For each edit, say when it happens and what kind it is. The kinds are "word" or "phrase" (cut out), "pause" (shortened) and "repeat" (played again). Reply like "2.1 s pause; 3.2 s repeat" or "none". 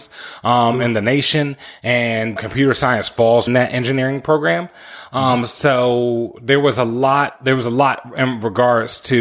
2.4 s word; 3.5 s word